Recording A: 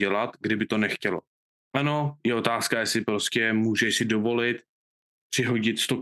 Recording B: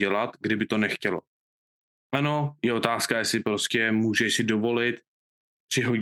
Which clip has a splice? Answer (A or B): A